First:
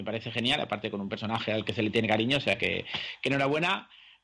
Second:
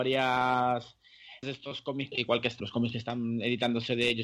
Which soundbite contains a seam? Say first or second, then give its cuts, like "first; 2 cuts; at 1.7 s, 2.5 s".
second; 3 cuts; at 1.4 s, 2.1 s, 2.6 s